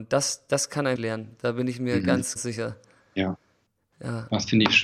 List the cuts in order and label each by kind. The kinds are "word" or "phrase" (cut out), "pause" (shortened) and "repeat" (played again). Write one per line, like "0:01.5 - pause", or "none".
0:01.0 - word
0:02.4 - word